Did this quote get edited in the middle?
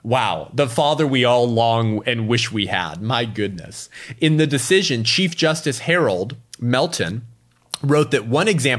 yes; 1 cut; at 6.5 s

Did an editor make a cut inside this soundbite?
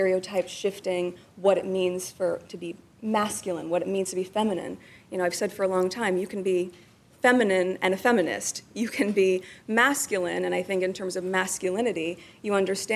no; 0 cuts

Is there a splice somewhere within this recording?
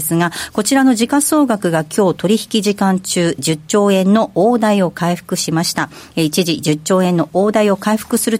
yes; 1 cut; at 3.4 s

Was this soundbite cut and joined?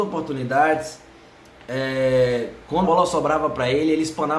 yes; 1 cut; at 2.8 s

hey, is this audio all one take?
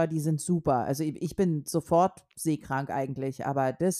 yes; 0 cuts

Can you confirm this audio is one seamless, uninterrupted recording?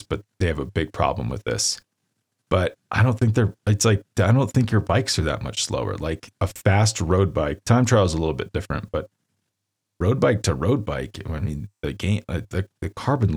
no; 1 cut; at 2.8 s

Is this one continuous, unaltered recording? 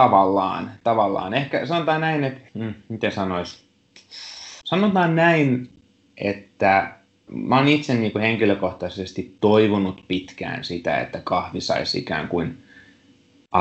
no; 3 cuts; at 2.5 s, 4.6 s, 7.3 s

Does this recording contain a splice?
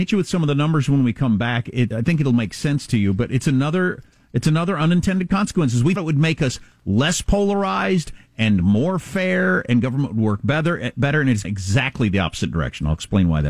yes; 3 cuts; at 1.9 s, 6.0 s, 11.4 s

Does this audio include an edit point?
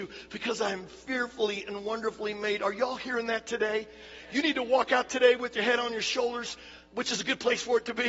yes; 1 cut; at 6.9 s

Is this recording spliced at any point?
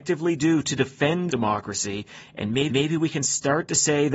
yes; 2 cuts; at 1.3 s, 2.7 s

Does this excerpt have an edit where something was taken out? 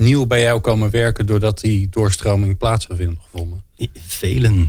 yes; 1 cut; at 2.9 s

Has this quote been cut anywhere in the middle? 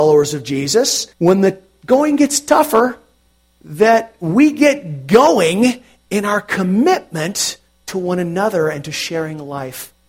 yes; 1 cut; at 1.1 s

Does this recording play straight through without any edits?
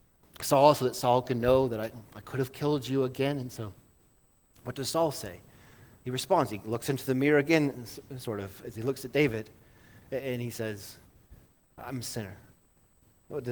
yes; 0 cuts

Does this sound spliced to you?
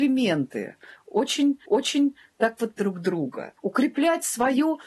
yes; 3 cuts; at 1.7 s, 2.8 s, 3.6 s

